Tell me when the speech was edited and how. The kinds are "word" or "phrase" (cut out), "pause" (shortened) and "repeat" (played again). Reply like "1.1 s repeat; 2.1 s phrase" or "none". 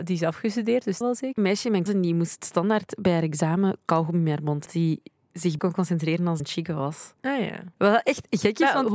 1.0 s word; 1.4 s phrase; 1.9 s word; 4.7 s phrase; 5.6 s word; 6.4 s phrase; 7.2 s pause; 7.7 s pause